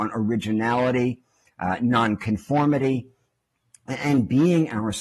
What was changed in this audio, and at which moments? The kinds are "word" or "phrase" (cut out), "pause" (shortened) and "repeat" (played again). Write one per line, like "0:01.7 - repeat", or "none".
none